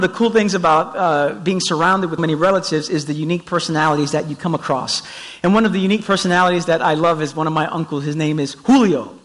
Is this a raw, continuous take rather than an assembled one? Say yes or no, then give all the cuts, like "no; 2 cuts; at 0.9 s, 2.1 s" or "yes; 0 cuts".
no; 1 cut; at 2.2 s